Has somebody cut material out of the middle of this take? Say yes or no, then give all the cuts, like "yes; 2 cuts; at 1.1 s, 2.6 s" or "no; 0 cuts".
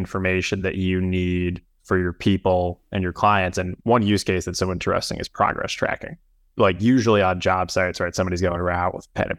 no; 0 cuts